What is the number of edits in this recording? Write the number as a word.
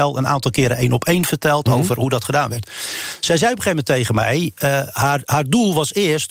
zero